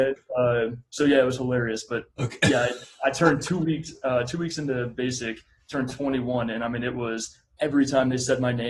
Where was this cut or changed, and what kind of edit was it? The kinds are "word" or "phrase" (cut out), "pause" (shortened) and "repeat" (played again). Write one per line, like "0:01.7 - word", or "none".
none